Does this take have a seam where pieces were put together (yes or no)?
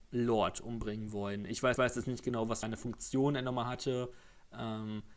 yes